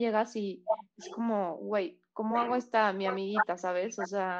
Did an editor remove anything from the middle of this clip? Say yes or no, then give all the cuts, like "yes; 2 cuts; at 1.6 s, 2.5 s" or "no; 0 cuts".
no; 0 cuts